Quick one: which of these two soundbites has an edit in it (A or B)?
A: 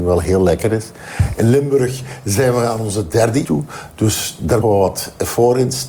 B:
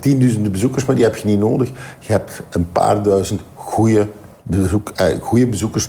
A